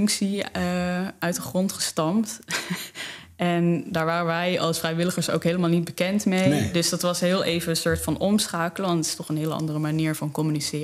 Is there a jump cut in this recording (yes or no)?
no